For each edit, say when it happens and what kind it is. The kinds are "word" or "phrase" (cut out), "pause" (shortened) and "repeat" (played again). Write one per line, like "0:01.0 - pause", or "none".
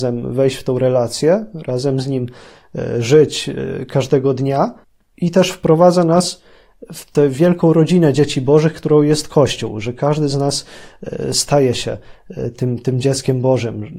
0:04.8 - pause